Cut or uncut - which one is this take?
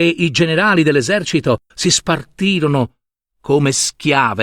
cut